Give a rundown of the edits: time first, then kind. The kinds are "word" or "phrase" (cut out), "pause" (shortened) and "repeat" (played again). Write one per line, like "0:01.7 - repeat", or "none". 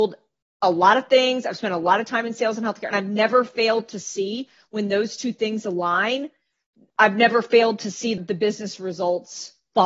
0:08.2 - word